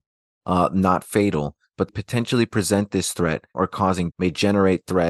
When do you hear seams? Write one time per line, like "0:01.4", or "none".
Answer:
0:01.9
0:03.5
0:04.1